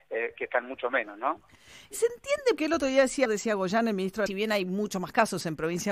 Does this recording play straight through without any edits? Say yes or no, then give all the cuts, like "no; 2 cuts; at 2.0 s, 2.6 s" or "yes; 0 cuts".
no; 3 cuts; at 2.6 s, 3.2 s, 4.3 s